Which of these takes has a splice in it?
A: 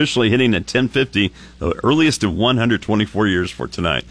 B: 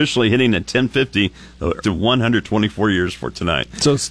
B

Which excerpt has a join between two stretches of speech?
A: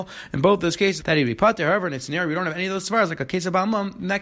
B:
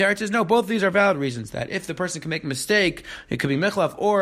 A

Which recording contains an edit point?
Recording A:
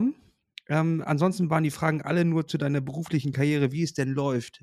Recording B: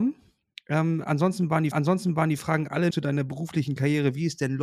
B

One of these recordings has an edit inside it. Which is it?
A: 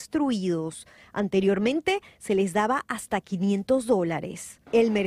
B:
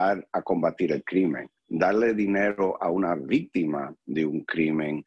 B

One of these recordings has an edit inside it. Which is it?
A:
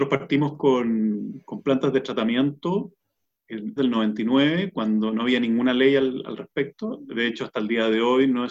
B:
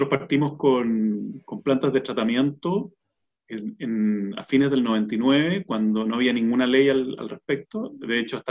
A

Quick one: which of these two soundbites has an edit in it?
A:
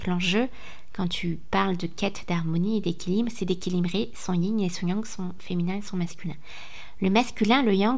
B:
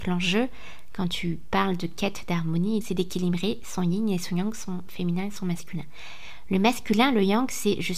B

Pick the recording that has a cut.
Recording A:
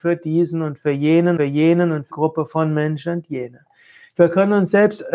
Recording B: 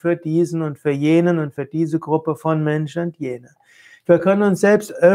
A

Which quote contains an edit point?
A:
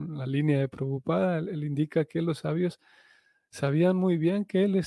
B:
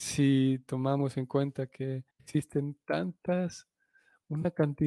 B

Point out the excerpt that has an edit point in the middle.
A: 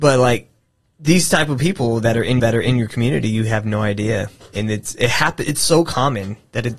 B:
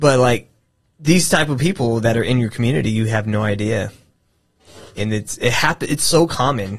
A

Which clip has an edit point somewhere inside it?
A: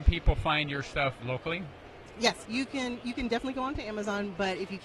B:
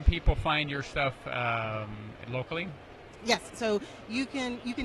A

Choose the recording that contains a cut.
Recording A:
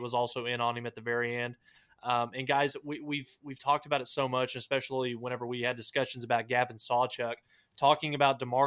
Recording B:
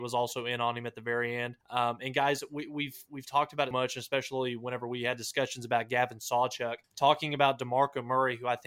B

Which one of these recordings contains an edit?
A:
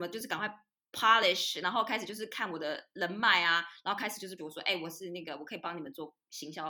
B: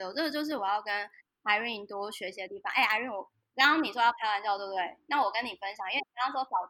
A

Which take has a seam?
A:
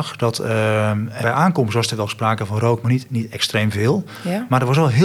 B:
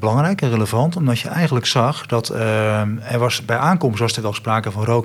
A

